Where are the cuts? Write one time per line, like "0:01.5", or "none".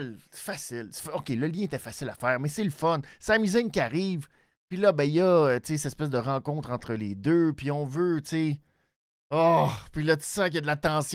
none